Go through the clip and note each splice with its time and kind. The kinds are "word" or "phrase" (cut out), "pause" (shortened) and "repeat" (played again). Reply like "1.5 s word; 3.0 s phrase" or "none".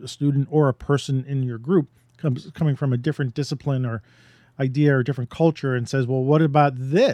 none